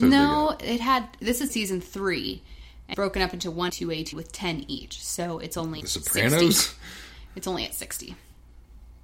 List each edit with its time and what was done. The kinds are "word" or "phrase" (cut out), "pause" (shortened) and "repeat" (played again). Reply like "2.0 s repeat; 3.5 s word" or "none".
1.5 s word; 2.9 s word; 3.7 s phrase; 4.1 s word; 5.8 s word